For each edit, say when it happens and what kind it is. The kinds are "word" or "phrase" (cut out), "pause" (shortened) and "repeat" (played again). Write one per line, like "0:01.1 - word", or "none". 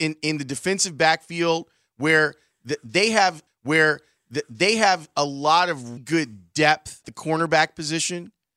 0:03.5 - repeat
0:06.0 - word
0:07.0 - word